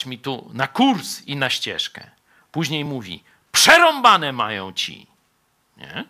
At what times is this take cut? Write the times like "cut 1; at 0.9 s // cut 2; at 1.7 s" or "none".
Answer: none